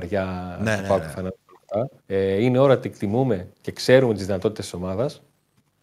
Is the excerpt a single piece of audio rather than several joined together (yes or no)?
no